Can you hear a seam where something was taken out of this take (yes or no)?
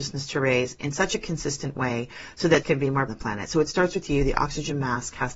yes